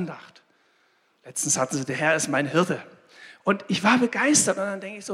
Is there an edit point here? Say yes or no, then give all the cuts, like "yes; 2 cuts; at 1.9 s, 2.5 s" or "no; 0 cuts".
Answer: no; 0 cuts